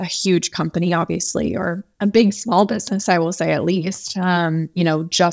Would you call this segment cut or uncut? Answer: uncut